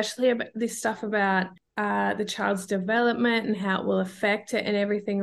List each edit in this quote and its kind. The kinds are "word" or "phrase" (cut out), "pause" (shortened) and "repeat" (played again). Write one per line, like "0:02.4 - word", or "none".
none